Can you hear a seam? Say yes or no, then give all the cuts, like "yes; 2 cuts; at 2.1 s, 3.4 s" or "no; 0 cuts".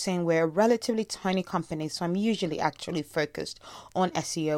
no; 0 cuts